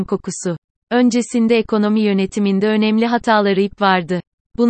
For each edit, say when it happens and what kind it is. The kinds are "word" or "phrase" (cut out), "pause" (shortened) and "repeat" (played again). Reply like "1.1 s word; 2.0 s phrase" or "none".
none

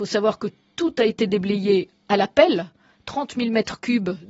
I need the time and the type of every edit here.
none

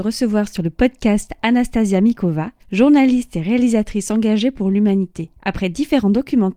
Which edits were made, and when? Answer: 2.6 s pause; 5.4 s pause

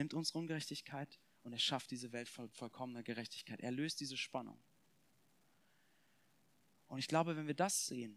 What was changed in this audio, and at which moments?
none

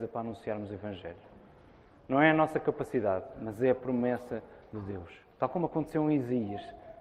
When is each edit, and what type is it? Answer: none

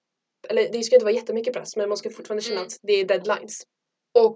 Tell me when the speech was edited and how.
none

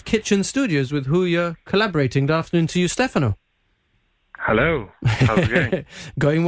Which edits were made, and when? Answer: none

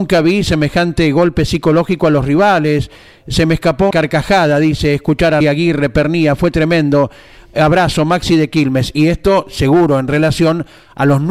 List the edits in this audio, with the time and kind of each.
3.9 s word; 5.4 s word

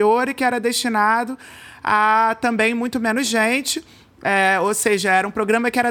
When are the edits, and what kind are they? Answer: none

